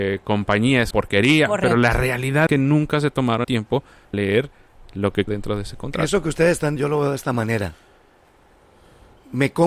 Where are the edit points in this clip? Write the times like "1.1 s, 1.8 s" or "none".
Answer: 0.9 s, 2.5 s, 3.4 s, 4.1 s, 5.3 s, 6.8 s